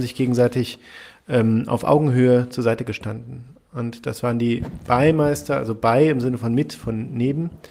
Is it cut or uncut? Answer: uncut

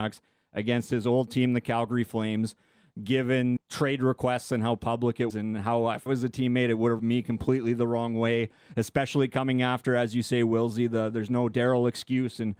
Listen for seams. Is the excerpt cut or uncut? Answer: cut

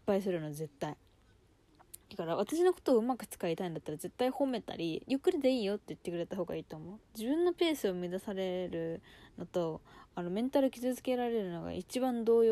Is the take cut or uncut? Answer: cut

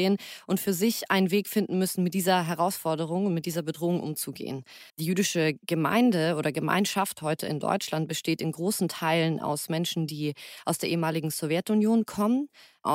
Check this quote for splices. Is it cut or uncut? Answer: cut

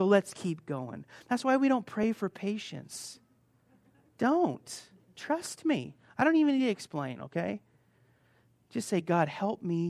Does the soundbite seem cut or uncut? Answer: uncut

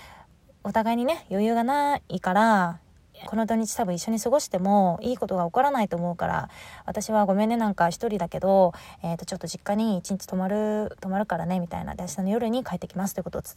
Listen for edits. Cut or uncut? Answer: cut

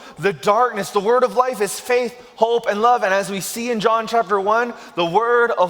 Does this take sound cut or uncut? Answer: uncut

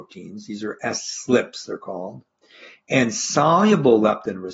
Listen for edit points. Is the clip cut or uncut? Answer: uncut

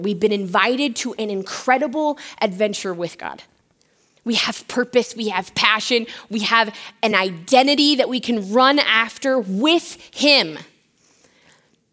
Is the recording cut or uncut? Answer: uncut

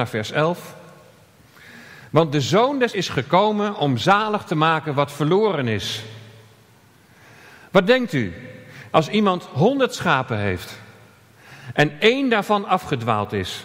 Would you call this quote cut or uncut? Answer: cut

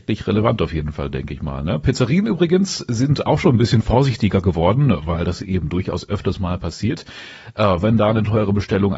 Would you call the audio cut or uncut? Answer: uncut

